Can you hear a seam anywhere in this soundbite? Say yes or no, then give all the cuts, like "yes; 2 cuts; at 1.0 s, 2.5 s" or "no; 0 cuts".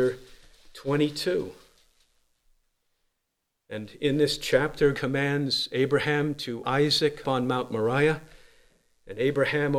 yes; 3 cuts; at 4.9 s, 6.6 s, 7.2 s